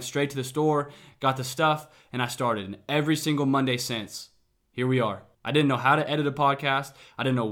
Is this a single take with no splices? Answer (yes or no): yes